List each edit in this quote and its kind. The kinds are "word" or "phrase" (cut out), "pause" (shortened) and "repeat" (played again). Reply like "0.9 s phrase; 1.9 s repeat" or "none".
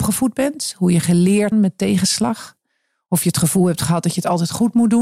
1.5 s phrase

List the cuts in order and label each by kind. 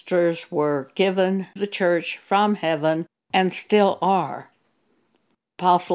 1.6 s word

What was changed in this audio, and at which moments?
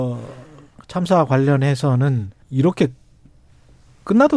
2.4 s pause

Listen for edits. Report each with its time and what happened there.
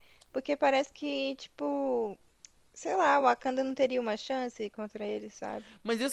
none

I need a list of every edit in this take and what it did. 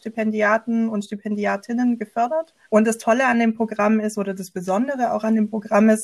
2.6 s pause

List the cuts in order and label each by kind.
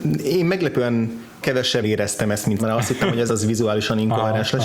1.4 s word; 1.8 s word; 2.6 s word; 3.3 s word

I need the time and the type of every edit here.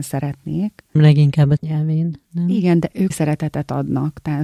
1.0 s word; 1.6 s word; 3.1 s word

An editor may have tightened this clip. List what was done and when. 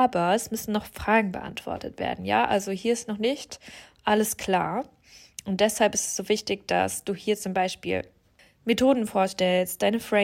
none

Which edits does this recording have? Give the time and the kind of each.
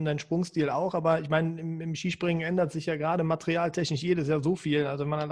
none

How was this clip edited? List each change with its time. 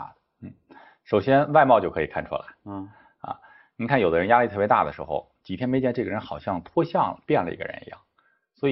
none

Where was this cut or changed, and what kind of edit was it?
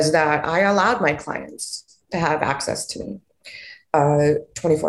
none

